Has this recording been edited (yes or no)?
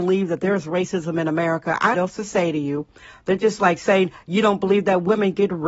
yes